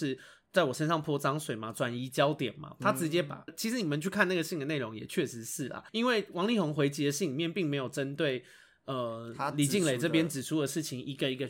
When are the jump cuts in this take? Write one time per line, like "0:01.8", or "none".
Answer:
0:03.5
0:05.9